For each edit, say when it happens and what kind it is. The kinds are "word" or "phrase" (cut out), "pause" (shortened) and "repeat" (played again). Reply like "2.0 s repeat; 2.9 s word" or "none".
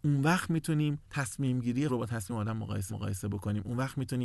1.0 s pause; 1.9 s word; 2.3 s word; 2.9 s repeat